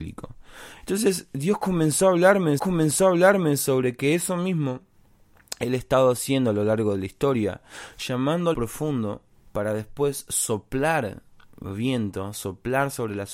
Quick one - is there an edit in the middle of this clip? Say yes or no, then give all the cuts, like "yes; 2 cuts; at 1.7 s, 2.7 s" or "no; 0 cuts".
yes; 3 cuts; at 2.6 s, 8.5 s, 9.4 s